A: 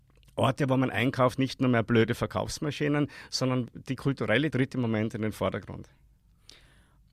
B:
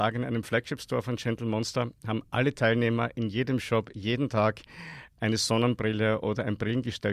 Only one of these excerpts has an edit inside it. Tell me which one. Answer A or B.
A